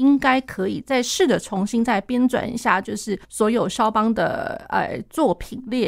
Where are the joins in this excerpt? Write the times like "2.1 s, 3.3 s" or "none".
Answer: 3.2 s